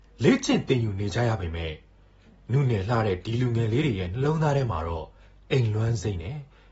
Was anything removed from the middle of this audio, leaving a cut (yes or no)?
no